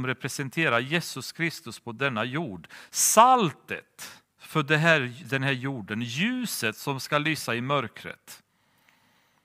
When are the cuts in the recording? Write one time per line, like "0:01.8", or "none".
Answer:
0:04.3